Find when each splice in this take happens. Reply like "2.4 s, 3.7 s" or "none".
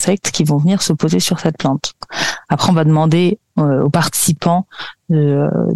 none